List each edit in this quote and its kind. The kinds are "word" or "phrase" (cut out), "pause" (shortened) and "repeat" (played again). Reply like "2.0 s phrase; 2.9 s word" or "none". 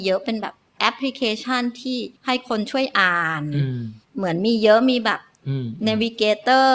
2.2 s pause; 4.0 s pause